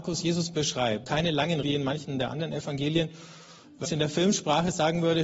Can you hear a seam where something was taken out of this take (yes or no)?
yes